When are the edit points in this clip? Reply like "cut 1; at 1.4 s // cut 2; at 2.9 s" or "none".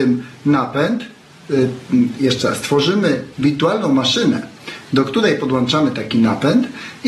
cut 1; at 3.3 s